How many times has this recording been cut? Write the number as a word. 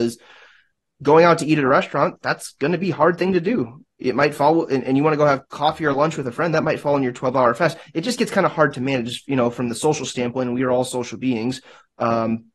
one